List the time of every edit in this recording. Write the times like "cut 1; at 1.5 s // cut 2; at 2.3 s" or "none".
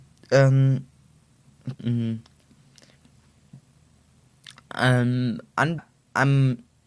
cut 1; at 1.7 s // cut 2; at 5.8 s